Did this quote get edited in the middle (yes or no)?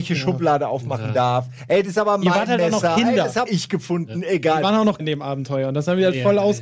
yes